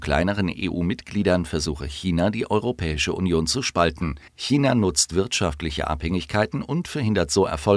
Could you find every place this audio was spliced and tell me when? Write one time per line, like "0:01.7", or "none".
0:04.3